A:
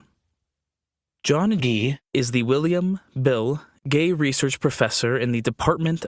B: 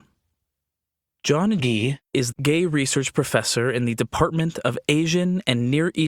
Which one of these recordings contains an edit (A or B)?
B